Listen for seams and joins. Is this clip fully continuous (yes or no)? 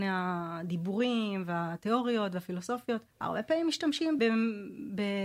no